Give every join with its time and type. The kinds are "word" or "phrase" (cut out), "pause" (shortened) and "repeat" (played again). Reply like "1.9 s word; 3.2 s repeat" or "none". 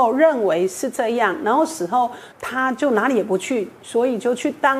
2.3 s pause